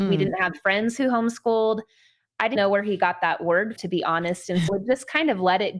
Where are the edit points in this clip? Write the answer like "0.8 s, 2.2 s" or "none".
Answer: 2.6 s, 3.8 s, 4.7 s